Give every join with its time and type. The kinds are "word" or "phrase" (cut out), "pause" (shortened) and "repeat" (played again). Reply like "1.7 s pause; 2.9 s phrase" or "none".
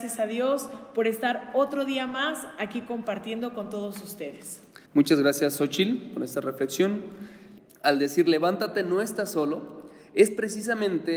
4.9 s pause